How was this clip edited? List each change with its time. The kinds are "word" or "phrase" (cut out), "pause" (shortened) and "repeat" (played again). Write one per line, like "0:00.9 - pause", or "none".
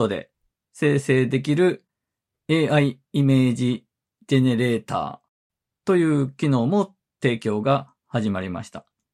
none